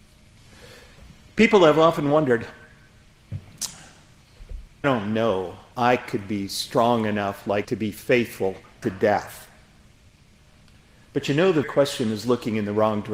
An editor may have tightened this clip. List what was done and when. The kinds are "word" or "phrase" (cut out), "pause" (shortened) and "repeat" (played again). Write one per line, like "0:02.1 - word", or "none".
0:04.8 - word
0:05.7 - word
0:07.6 - word
0:08.8 - word
0:11.6 - word